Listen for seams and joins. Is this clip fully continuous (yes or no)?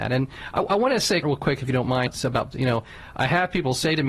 no